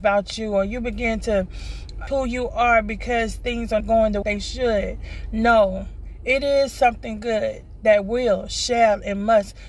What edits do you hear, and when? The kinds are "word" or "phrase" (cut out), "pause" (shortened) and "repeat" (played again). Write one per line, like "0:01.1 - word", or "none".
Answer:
0:02.1 - word
0:03.8 - word
0:04.2 - phrase

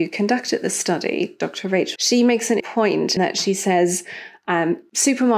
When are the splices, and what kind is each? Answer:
0:02.0 - word
0:02.6 - word
0:03.2 - word

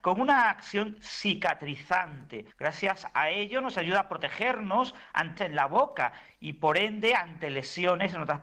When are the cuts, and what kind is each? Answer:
0:02.5 - pause
0:05.4 - word

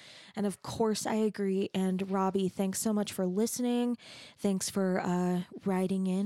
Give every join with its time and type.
none

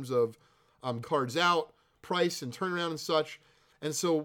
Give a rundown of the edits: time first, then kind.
0:01.0 - word

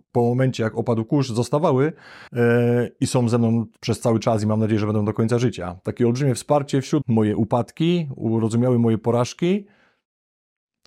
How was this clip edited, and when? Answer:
0:02.3 - pause
0:07.0 - phrase

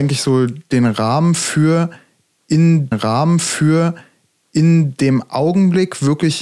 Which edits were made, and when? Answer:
0:02.9 - repeat

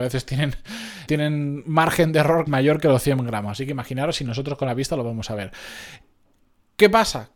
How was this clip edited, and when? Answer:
0:01.1 - word
0:02.5 - word

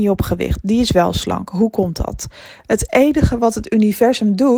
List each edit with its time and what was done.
none

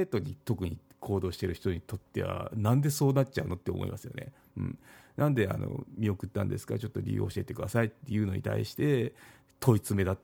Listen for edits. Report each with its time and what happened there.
none

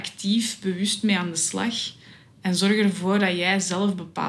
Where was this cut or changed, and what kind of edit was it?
none

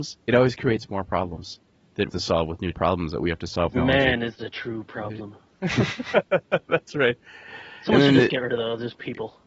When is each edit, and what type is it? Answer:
0:02.1 - phrase
0:02.7 - phrase
0:03.7 - word

